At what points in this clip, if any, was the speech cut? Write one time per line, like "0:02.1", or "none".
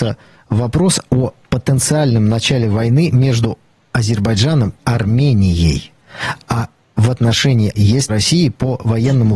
0:01.4
0:04.8
0:07.7
0:08.1